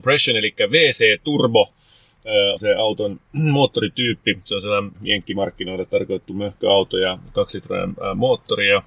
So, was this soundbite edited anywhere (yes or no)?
yes